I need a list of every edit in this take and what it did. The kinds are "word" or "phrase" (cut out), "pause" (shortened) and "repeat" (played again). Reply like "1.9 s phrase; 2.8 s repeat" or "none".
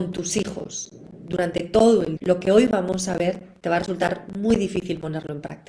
2.2 s word